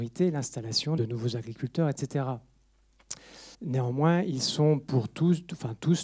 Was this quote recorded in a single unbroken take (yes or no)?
no